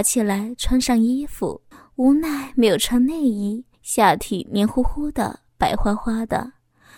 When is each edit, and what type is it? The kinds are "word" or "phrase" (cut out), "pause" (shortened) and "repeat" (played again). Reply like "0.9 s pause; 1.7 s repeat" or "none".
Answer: 1.7 s pause; 3.7 s pause